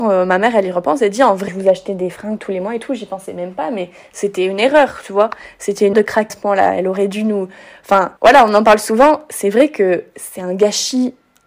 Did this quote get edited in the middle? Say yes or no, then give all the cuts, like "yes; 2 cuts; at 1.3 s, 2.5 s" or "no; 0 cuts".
yes; 4 cuts; at 1.5 s, 5.9 s, 6.3 s, 8.2 s